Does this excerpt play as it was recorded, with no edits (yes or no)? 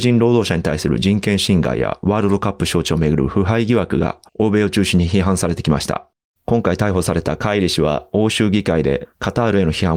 no